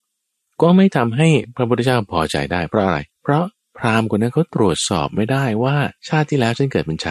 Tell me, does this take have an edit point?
yes; 2 cuts; at 3.1 s, 6.0 s

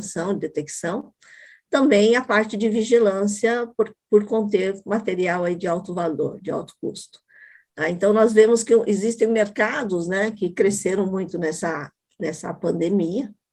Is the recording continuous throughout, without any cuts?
yes; 0 cuts

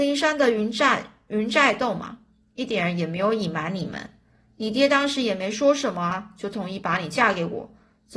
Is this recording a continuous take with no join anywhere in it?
yes; 0 cuts

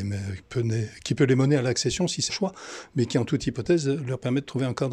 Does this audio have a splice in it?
yes; 1 cut; at 2.3 s

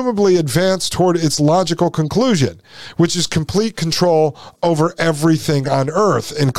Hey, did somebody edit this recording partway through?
no; 0 cuts

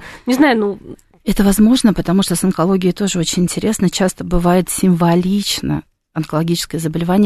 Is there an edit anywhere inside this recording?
no; 0 cuts

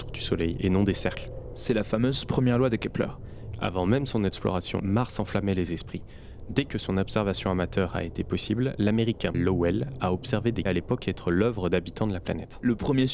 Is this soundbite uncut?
no; 3 cuts; at 4.8 s, 9.3 s, 10.7 s

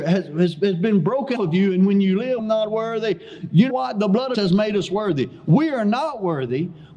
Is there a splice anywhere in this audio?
yes; 4 cuts; at 1.4 s, 2.4 s, 3.7 s, 4.3 s

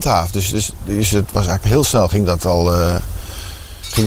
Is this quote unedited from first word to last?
yes; 0 cuts

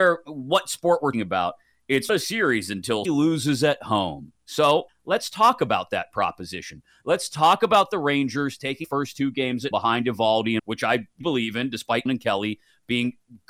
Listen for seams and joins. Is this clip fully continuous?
no; 9 cuts; at 1.1 s, 2.1 s, 3.0 s, 4.9 s, 8.8 s, 9.7 s, 10.6 s, 11.2 s, 12.1 s

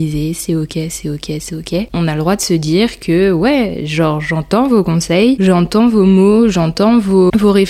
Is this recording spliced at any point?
no; 0 cuts

